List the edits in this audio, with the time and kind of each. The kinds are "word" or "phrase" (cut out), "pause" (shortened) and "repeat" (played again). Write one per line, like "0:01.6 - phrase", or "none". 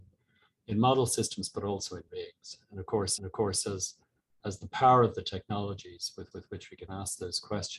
0:02.1 - word
0:03.2 - repeat
0:06.3 - repeat